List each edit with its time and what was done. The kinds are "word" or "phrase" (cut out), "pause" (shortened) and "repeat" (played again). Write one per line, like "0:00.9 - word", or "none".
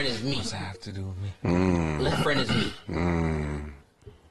0:02.1 - word